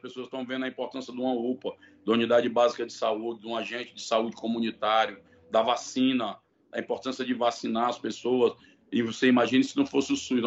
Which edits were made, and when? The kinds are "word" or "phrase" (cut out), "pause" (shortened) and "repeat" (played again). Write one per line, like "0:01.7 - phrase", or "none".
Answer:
none